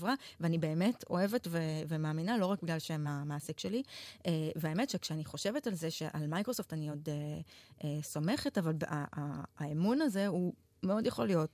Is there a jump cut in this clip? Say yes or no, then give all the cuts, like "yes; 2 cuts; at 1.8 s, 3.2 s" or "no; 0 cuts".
no; 0 cuts